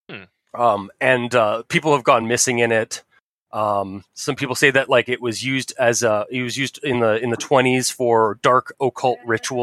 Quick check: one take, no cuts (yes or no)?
yes